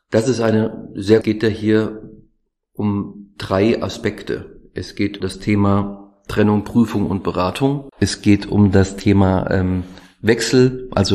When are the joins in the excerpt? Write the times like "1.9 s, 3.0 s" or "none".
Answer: 1.2 s, 5.2 s, 7.9 s